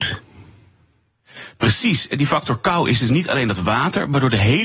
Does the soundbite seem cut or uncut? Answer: uncut